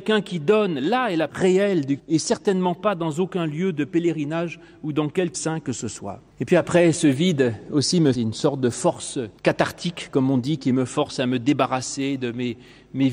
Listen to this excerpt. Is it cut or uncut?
cut